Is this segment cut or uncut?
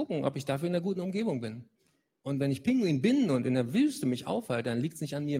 uncut